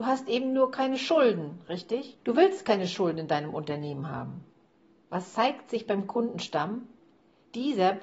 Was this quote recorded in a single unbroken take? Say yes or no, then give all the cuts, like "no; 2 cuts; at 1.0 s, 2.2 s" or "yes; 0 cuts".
yes; 0 cuts